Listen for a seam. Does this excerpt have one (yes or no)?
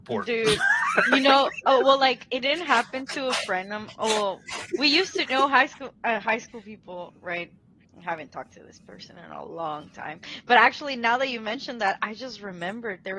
no